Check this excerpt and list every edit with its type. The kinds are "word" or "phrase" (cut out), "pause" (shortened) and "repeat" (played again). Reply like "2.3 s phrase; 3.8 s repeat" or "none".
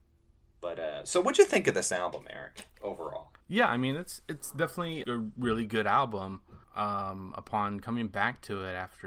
3.4 s pause; 5.0 s word; 6.6 s pause